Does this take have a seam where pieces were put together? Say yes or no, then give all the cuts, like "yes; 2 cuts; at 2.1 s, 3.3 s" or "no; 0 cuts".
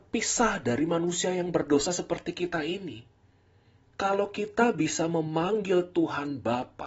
no; 0 cuts